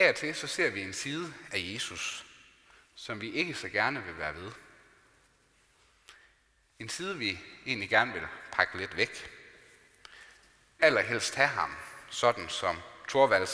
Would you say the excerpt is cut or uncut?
cut